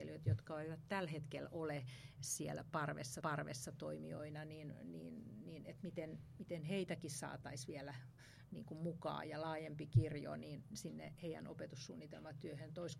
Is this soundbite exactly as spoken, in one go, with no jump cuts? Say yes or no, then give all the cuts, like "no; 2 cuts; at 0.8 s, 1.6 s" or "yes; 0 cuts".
no; 1 cut; at 3.2 s